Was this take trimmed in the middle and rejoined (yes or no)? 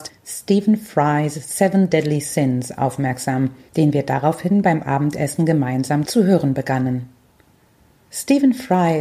no